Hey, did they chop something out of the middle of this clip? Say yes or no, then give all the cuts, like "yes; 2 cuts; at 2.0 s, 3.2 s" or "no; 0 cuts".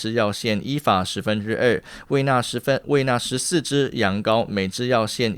yes; 1 cut; at 2.8 s